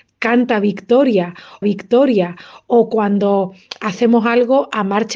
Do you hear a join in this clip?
yes; 1 cut; at 1.6 s

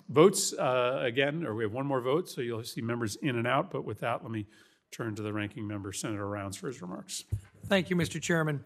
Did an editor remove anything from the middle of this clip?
no; 0 cuts

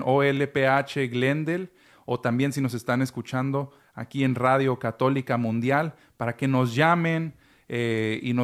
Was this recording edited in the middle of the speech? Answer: no; 0 cuts

